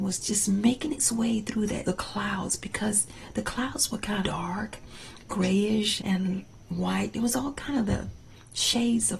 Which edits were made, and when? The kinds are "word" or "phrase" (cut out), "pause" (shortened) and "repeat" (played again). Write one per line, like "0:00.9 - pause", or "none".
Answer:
0:01.8 - phrase
0:04.2 - word
0:06.0 - word